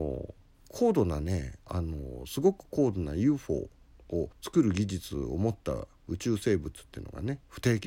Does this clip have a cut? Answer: yes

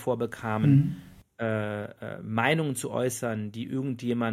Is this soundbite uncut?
yes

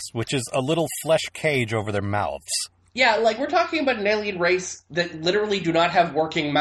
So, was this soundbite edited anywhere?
no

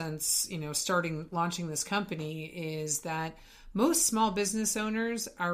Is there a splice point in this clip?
no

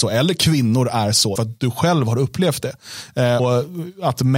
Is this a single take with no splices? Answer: no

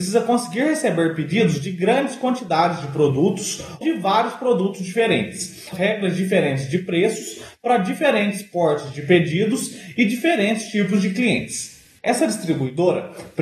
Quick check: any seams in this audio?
yes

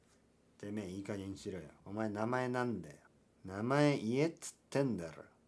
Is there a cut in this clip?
yes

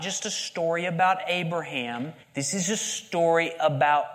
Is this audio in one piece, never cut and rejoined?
no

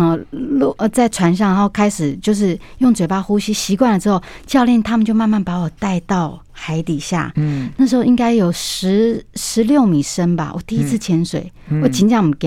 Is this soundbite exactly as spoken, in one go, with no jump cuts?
yes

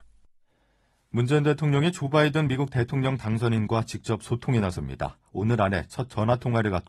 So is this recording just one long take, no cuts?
yes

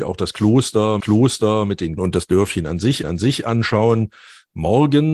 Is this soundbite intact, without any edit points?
no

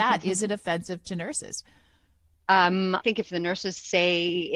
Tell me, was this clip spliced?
yes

